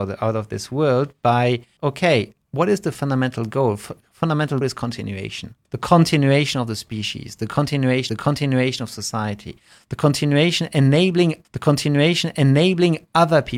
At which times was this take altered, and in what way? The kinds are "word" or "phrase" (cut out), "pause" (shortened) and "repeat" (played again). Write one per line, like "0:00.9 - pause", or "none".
0:01.8 - phrase
0:02.4 - pause
0:04.6 - word
0:05.6 - pause
0:08.1 - repeat
0:11.4 - repeat